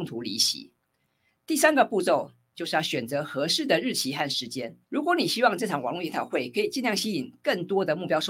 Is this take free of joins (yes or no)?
no